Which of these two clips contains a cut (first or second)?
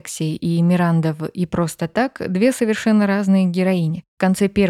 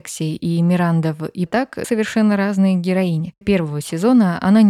second